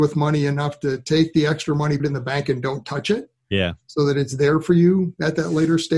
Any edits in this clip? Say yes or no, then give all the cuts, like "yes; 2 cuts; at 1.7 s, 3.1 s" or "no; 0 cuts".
yes; 1 cut; at 2.0 s